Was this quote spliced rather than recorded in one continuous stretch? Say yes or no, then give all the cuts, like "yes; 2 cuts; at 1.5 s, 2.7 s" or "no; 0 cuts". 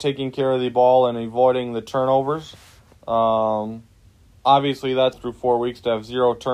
yes; 1 cut; at 5.1 s